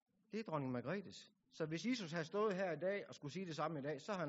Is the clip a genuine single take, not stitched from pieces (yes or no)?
no